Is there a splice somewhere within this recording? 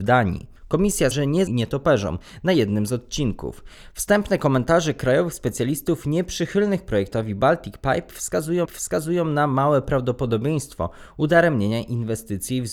yes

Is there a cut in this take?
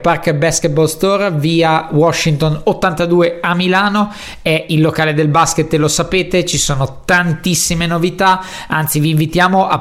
no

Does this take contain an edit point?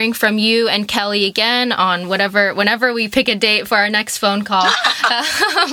no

